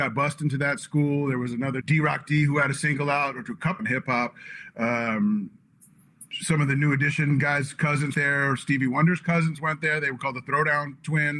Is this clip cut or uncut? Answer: cut